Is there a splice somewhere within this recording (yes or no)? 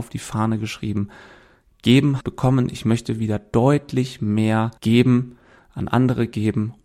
yes